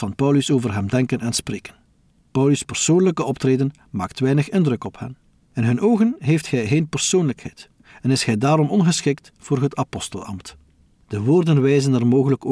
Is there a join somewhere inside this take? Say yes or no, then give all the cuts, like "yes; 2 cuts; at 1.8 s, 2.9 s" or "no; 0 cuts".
no; 0 cuts